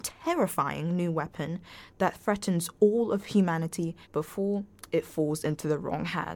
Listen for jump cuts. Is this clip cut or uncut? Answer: cut